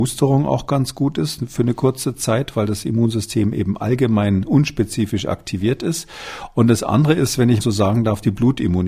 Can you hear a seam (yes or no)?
yes